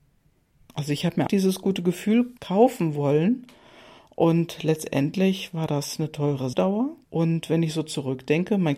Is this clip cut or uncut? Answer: cut